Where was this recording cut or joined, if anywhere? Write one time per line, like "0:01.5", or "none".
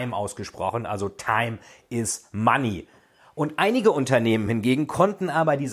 none